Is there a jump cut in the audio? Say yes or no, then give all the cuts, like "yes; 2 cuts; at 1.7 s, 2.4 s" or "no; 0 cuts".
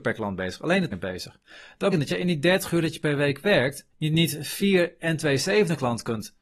yes; 3 cuts; at 0.9 s, 1.9 s, 3.9 s